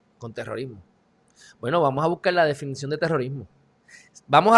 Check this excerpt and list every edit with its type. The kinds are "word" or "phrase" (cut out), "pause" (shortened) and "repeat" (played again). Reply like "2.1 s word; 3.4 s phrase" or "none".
none